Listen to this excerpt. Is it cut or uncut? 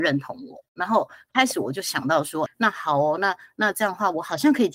cut